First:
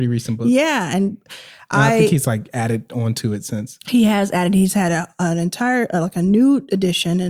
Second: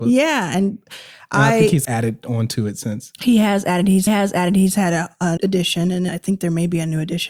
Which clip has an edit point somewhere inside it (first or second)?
second